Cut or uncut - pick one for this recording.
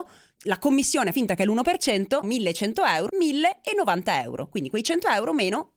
cut